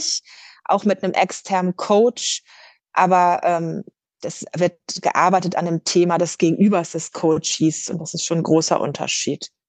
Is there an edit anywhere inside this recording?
no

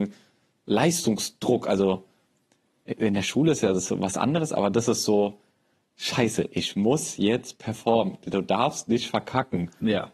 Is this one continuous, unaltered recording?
yes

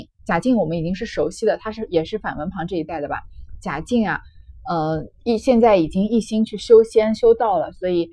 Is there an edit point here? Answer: yes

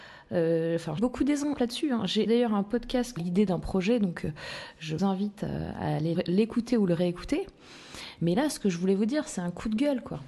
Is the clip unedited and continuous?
no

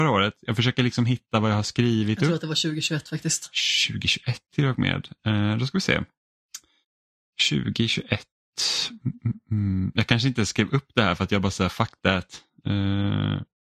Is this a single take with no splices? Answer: yes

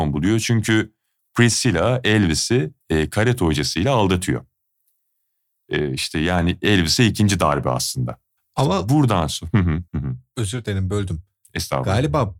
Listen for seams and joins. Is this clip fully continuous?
no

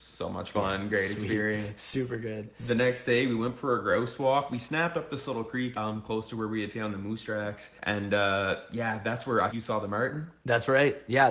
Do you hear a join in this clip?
yes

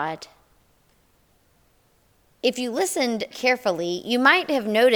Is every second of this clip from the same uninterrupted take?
no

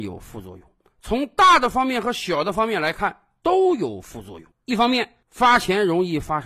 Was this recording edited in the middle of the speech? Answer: yes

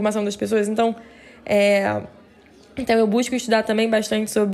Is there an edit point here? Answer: no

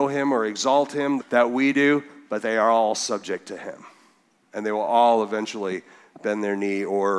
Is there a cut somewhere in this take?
yes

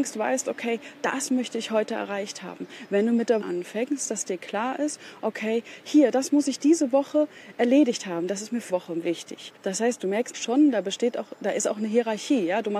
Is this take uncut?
no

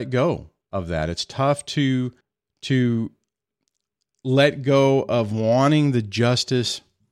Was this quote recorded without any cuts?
no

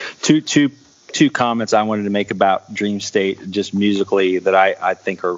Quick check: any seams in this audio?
no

